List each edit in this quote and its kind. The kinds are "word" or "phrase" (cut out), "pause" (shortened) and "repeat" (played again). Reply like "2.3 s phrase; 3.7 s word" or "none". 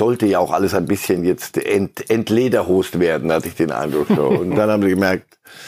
none